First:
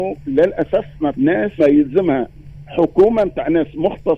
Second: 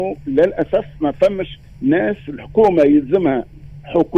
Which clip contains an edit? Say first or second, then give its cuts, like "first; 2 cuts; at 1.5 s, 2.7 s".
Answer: first; 2 cuts; at 1.1 s, 1.6 s